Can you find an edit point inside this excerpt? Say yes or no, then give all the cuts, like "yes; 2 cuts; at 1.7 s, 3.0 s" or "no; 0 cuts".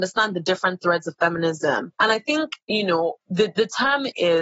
yes; 1 cut; at 1.9 s